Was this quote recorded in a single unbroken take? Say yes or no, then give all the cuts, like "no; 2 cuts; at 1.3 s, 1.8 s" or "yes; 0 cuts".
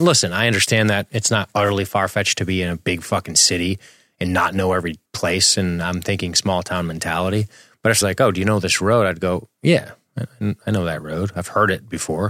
no; 1 cut; at 8.0 s